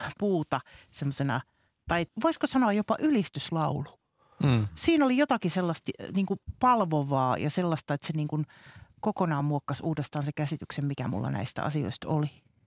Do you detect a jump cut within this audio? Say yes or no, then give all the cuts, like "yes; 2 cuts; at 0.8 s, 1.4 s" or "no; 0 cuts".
no; 0 cuts